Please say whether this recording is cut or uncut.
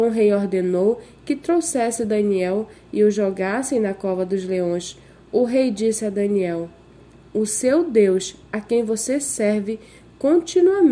uncut